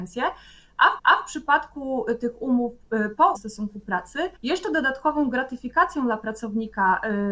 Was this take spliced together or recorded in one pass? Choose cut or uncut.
cut